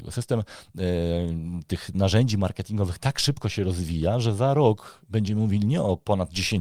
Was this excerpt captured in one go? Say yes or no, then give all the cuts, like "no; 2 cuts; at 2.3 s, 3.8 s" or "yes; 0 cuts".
no; 1 cut; at 1.9 s